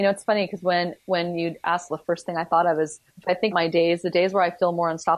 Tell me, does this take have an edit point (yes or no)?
yes